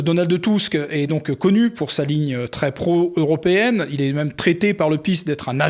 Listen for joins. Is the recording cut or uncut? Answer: uncut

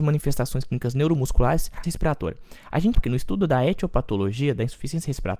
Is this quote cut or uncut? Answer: cut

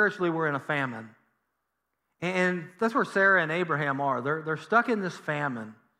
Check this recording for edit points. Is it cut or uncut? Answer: uncut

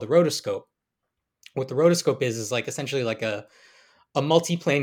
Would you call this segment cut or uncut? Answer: uncut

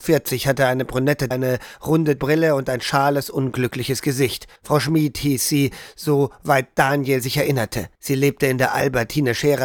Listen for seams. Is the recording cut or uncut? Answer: cut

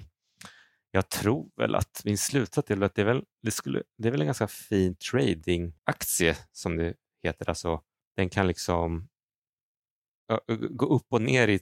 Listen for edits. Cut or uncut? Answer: cut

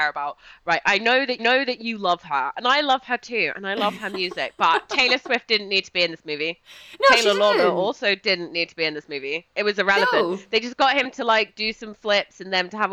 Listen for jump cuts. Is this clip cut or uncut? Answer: cut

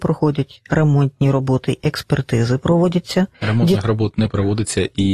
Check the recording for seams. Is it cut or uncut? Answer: cut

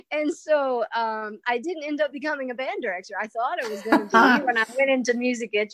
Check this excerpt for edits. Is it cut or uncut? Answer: uncut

